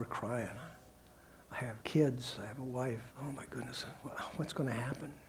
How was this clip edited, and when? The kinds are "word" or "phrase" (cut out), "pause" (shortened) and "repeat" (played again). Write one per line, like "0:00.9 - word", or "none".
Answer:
0:01.8 - pause
0:03.1 - pause